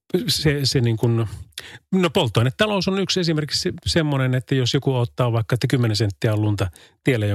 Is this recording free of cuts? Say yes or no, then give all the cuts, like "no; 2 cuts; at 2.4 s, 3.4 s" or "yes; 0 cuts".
yes; 0 cuts